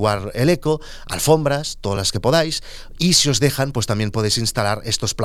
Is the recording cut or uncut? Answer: uncut